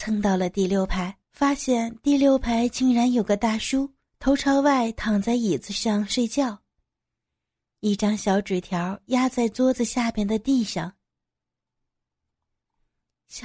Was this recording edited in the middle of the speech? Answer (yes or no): yes